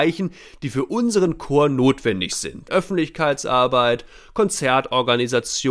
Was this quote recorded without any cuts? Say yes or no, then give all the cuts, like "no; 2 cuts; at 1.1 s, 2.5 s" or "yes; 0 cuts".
no; 1 cut; at 2.7 s